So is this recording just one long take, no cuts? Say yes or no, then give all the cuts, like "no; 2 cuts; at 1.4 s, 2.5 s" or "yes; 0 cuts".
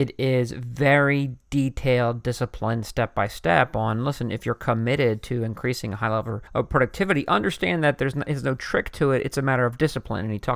no; 1 cut; at 6.5 s